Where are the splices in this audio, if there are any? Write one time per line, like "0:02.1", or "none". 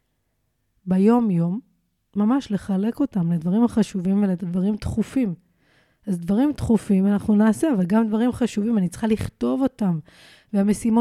none